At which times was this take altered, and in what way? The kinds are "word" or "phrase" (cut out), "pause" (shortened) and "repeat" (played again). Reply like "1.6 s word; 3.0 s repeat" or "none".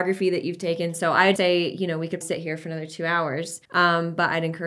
1.4 s word; 2.2 s word; 3.6 s pause

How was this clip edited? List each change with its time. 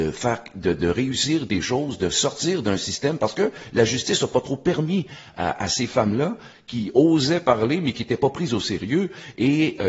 none

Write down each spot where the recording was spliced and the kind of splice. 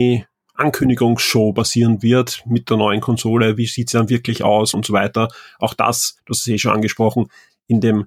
4.7 s phrase; 6.2 s pause

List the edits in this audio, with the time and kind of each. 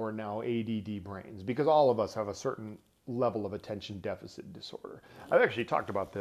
none

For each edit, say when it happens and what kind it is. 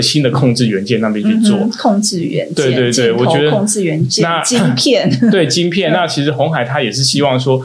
none

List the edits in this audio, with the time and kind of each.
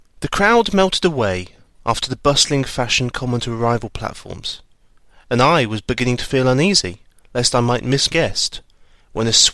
8.1 s word

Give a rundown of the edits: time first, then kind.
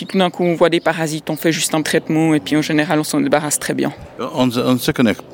1.8 s word

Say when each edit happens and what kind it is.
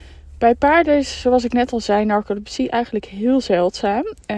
none

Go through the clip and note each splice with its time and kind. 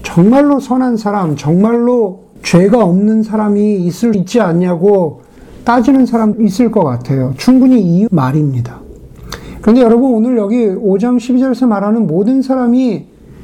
2.4 s pause; 4.1 s word; 6.3 s word; 8.1 s word

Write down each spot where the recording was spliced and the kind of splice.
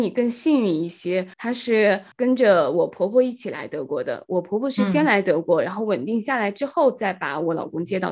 1.3 s pause; 2.1 s pause

